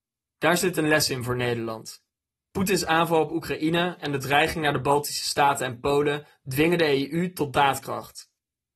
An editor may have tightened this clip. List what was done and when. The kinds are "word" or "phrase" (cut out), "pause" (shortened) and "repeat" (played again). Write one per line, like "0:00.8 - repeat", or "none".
none